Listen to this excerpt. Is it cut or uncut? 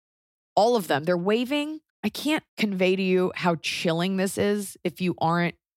cut